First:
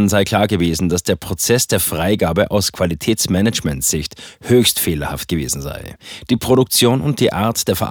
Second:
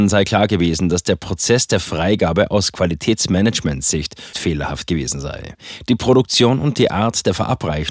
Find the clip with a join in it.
second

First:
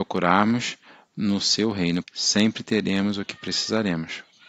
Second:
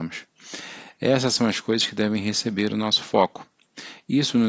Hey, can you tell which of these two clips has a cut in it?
first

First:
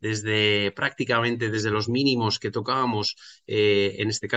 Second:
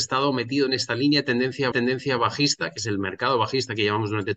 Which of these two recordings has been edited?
second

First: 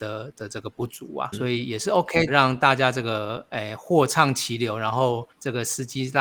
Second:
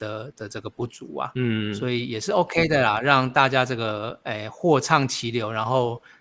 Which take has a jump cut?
first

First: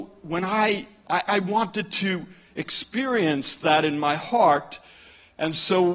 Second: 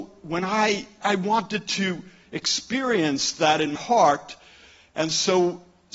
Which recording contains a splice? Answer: second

